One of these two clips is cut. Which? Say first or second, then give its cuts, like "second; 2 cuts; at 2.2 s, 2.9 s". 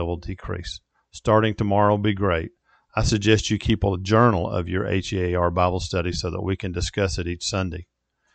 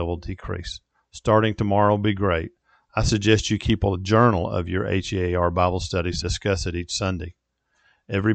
second; 1 cut; at 6.2 s